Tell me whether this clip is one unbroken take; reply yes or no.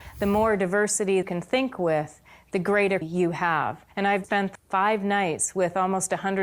no